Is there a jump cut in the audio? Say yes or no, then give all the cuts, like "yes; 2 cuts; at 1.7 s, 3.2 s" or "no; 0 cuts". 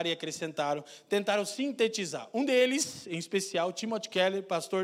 no; 0 cuts